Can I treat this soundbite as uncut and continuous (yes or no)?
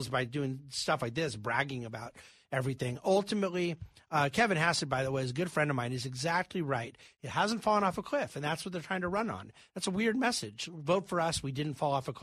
yes